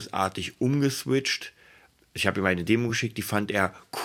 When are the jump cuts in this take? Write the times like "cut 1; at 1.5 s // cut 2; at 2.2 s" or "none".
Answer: none